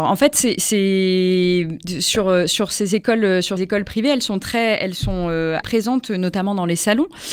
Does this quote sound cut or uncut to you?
cut